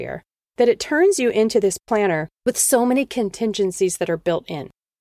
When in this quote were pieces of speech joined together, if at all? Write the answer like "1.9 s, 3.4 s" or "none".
1.8 s, 2.3 s